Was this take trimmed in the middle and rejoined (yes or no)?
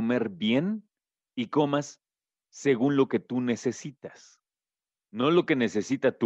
no